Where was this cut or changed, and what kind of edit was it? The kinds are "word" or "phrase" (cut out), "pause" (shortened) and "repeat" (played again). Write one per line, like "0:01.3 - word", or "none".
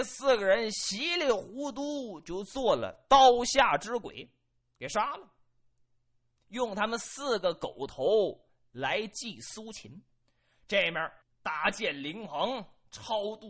0:11.2 - pause